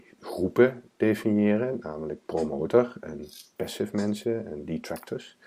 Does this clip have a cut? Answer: no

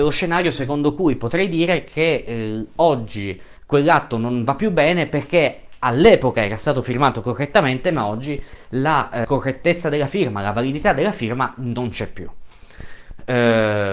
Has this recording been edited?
yes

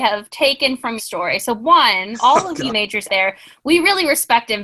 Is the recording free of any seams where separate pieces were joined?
no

